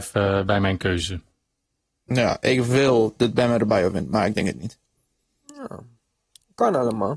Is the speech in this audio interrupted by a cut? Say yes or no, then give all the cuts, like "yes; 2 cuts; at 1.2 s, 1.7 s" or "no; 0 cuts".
no; 0 cuts